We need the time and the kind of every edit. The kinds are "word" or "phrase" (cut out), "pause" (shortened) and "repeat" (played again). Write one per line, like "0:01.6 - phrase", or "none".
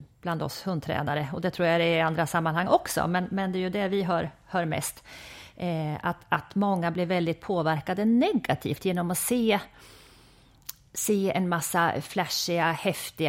none